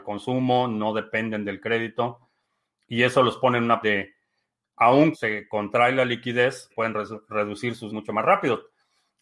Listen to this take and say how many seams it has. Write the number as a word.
four